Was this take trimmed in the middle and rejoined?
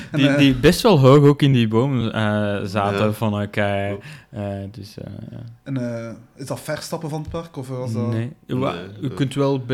no; 0 cuts

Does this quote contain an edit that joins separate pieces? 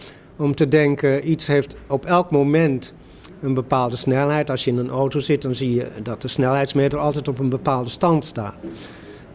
no; 0 cuts

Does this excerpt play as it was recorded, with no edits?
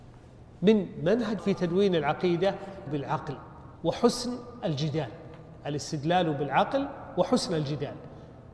no; 3 cuts; at 1.4 s, 2.9 s, 3.8 s

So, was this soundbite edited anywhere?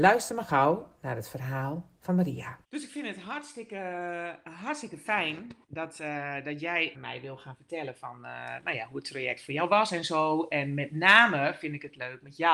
yes; 3 cuts; at 2.6 s, 5.6 s, 6.9 s

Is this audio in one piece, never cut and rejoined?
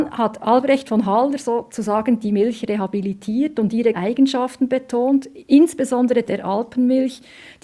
no; 2 cuts; at 3.9 s, 6.3 s

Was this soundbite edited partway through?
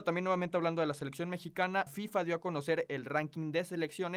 yes; 1 cut; at 1.9 s

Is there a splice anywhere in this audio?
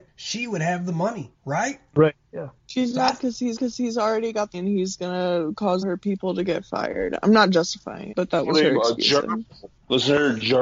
yes; 4 cuts; at 3.6 s, 4.5 s, 5.8 s, 8.1 s

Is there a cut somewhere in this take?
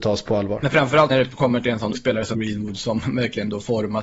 yes; 3 cuts; at 1.1 s, 1.9 s, 2.3 s

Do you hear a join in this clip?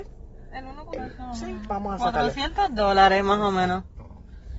yes; 1 cut; at 1.0 s

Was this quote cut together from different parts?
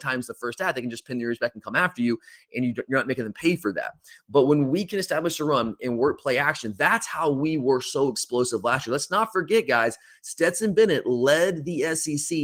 no; 0 cuts

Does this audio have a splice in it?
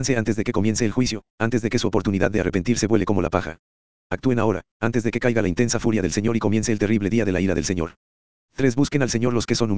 no; 0 cuts

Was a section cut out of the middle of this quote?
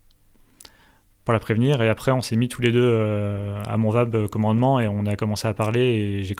no; 0 cuts

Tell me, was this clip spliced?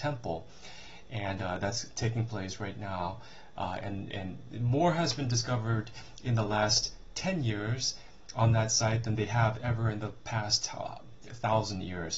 no; 0 cuts

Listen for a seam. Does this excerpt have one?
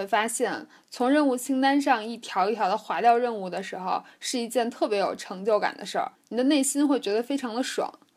yes; 1 cut; at 6.1 s

